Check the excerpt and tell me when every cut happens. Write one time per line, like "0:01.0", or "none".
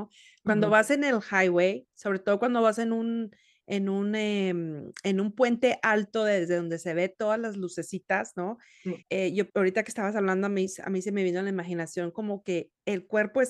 0:09.0
0:09.5